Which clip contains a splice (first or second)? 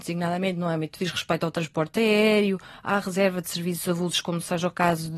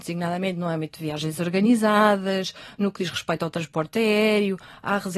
first